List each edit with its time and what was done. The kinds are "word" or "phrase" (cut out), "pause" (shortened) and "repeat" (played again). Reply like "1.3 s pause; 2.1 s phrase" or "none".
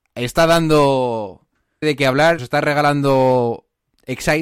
1.8 s word; 2.4 s word